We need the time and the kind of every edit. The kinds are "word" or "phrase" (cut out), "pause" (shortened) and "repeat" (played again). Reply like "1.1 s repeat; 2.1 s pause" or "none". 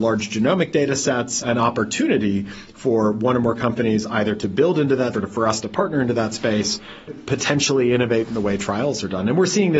1.4 s word; 5.1 s word; 7.1 s word